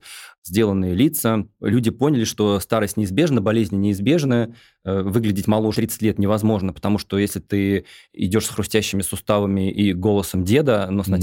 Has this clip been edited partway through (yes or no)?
yes